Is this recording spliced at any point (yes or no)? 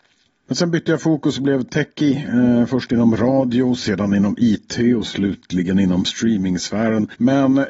no